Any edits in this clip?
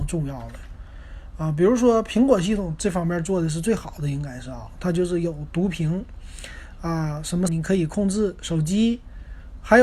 yes; 1 cut; at 7.5 s

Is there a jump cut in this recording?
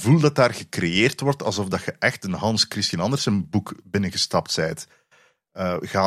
no; 0 cuts

